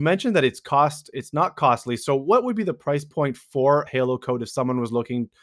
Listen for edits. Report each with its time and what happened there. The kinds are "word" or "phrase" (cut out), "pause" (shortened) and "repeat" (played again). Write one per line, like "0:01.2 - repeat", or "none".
0:03.9 - word